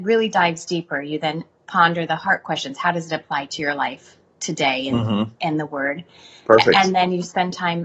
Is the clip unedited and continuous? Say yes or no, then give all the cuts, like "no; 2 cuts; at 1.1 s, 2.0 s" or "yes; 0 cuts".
yes; 0 cuts